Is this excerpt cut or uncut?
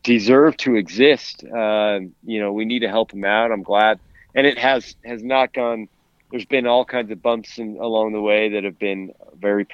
uncut